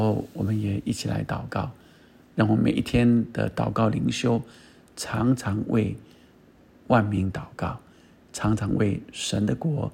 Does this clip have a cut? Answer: no; 0 cuts

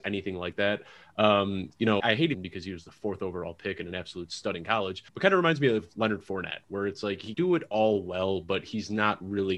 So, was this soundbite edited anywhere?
yes; 4 cuts; at 2.0 s, 2.3 s, 5.1 s, 7.3 s

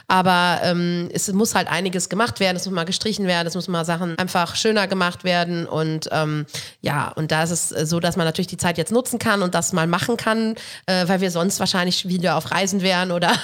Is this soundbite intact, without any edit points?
no; 1 cut; at 4.1 s

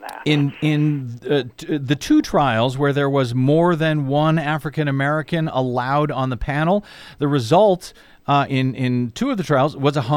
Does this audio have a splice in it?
no; 0 cuts

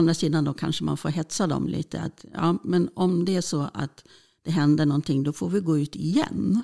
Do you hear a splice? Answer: no; 0 cuts

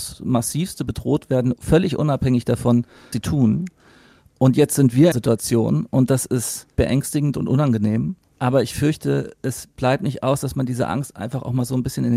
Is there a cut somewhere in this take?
yes; 3 cuts; at 3.1 s, 5.1 s, 6.8 s

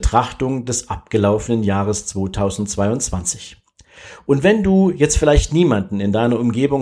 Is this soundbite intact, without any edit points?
yes; 0 cuts

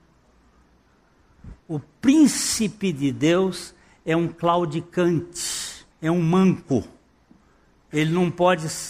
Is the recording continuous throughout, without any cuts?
no; 2 cuts; at 1.6 s, 5.9 s

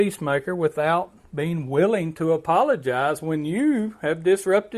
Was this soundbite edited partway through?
no; 0 cuts

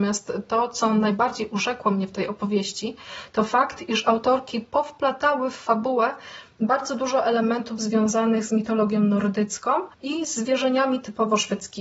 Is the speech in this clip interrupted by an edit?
yes; 1 cut; at 9.9 s

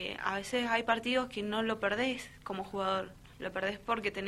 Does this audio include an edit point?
yes; 1 cut; at 3.3 s

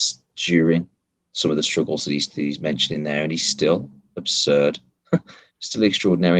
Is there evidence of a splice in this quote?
no; 0 cuts

